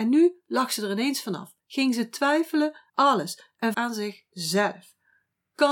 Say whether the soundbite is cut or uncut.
cut